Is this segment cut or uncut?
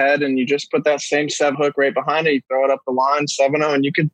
cut